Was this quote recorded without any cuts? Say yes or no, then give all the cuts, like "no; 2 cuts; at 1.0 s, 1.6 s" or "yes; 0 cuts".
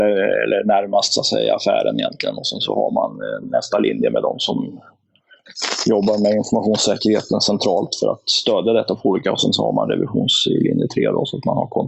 yes; 0 cuts